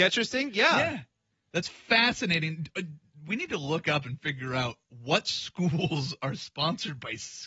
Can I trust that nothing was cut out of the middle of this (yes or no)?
yes